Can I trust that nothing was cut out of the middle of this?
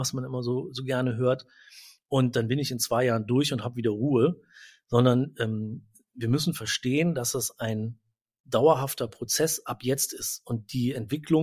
yes; 0 cuts

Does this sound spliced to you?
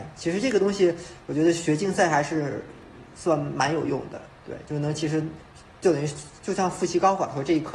no; 0 cuts

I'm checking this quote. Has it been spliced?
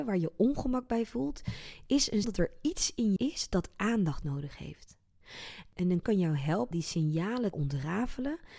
yes; 5 cuts; at 2.2 s, 3.2 s, 6.0 s, 6.7 s, 7.5 s

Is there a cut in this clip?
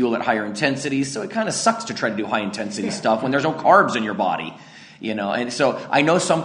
no; 0 cuts

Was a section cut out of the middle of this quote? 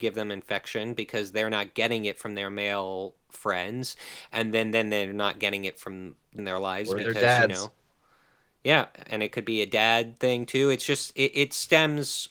yes; 1 cut; at 6.4 s

